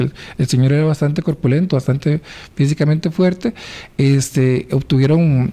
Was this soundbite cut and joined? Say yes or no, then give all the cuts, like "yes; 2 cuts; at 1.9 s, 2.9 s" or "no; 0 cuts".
no; 0 cuts